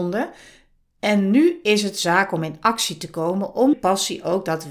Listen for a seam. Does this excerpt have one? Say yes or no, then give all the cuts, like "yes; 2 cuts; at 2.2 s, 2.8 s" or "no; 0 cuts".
yes; 1 cut; at 3.7 s